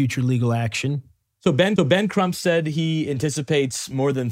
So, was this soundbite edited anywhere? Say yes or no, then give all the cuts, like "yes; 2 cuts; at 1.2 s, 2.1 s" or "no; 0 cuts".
yes; 1 cut; at 1.8 s